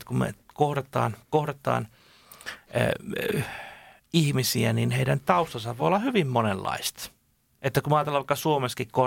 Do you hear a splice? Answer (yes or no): no